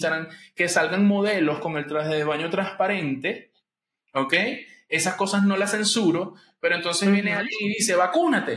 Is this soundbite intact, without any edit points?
yes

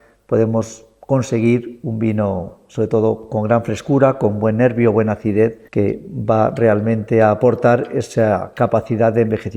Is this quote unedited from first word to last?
no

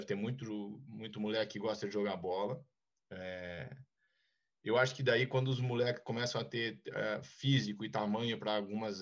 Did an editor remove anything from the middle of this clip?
no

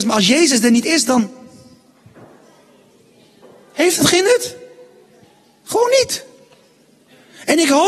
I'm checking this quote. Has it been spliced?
no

